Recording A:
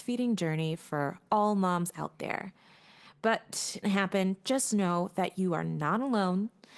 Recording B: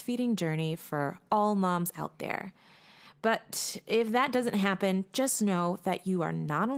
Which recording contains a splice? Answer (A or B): A